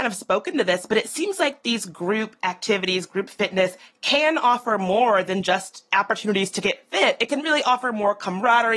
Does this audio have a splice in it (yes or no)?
no